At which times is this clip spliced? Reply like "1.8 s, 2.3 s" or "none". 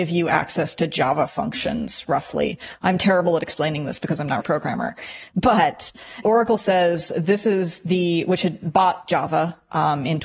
4.4 s, 6.2 s

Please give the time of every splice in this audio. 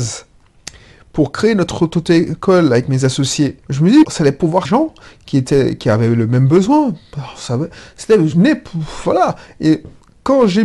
3.6 s, 4.0 s, 4.6 s

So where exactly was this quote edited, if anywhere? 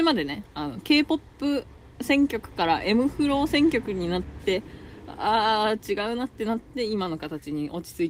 none

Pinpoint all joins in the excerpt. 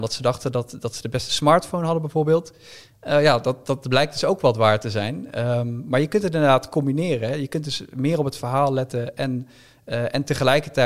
none

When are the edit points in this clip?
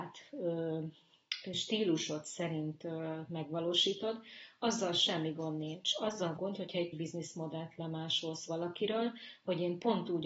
6.4 s, 6.9 s

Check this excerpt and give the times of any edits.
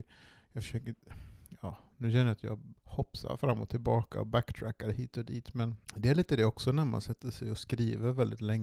2.8 s, 5.8 s

